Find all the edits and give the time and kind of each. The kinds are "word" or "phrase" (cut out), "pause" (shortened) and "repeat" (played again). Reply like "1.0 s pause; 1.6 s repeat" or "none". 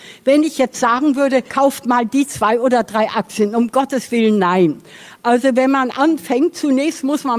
1.5 s pause